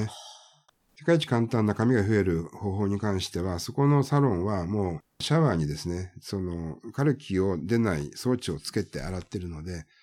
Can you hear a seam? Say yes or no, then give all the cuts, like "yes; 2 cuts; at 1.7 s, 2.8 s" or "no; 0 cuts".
yes; 1 cut; at 5.1 s